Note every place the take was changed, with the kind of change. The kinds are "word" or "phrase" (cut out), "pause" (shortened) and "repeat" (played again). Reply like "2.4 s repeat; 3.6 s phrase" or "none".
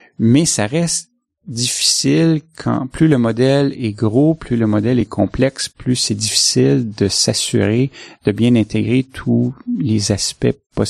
none

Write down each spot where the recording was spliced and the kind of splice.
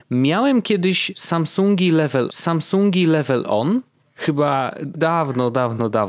2.3 s repeat; 4.9 s word

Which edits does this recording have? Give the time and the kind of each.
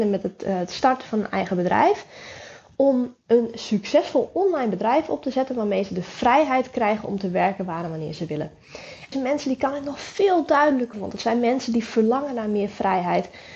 3.2 s pause; 9.1 s word; 10.9 s word

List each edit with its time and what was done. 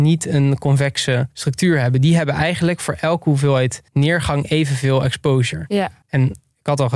1.3 s pause; 3.9 s pause; 6.0 s pause

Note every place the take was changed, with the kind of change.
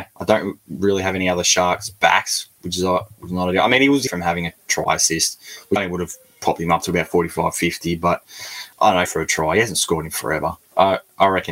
4.1 s phrase; 5.8 s word; 8.7 s pause; 9.0 s phrase

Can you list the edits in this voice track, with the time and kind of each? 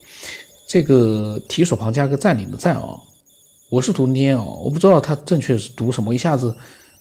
none

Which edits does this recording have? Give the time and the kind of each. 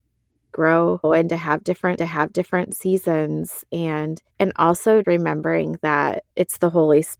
1.0 s word; 2.0 s repeat; 4.3 s pause; 5.0 s word; 6.3 s pause

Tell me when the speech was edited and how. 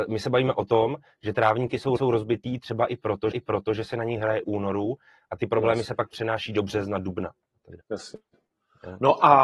2.0 s repeat; 3.3 s repeat; 4.4 s phrase; 7.8 s pause

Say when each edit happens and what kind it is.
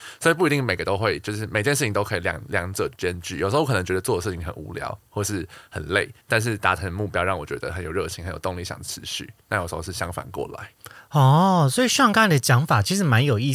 6.2 s pause

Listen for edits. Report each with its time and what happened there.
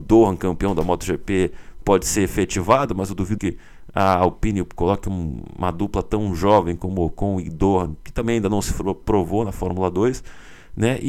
3.4 s word

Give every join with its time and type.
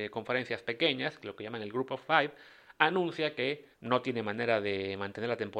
3.7 s pause

